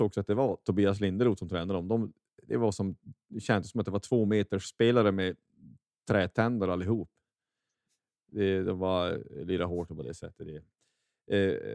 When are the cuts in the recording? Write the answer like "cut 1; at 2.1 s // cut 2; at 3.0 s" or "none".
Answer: none